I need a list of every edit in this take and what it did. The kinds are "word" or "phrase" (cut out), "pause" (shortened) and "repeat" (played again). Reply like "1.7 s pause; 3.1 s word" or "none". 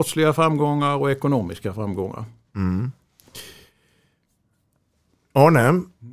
none